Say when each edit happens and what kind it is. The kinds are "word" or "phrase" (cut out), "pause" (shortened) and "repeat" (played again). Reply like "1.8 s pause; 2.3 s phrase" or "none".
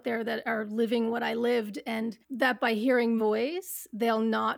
2.2 s pause; 3.2 s word